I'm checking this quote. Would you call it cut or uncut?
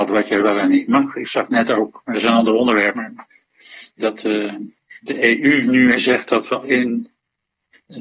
cut